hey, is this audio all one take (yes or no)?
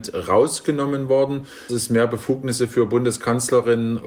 no